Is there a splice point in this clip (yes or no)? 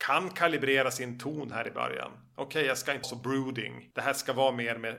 yes